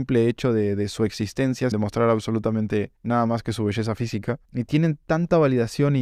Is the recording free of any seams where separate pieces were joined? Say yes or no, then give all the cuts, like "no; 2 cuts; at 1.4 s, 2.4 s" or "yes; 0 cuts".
no; 3 cuts; at 1.7 s, 3.0 s, 4.4 s